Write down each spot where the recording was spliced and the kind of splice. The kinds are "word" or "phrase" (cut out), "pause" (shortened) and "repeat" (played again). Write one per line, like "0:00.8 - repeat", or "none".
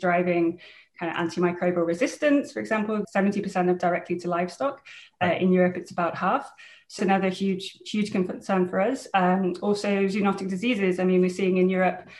0:03.0 - word
0:03.8 - phrase
0:07.0 - phrase

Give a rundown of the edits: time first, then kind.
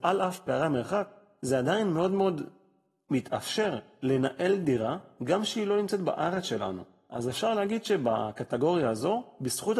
none

